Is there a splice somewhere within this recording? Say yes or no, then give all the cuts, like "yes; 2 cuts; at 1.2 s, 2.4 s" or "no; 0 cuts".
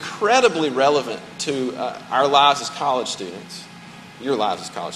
no; 0 cuts